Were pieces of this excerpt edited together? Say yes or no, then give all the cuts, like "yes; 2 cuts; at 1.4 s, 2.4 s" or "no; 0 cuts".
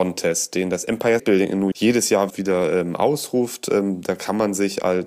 yes; 3 cuts; at 1.2 s, 1.7 s, 2.3 s